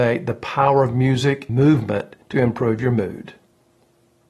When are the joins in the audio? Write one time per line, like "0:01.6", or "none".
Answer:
0:01.5
0:02.2